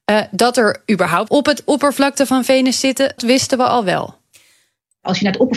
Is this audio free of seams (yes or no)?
no